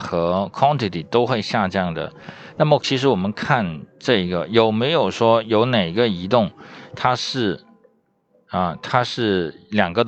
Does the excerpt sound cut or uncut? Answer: uncut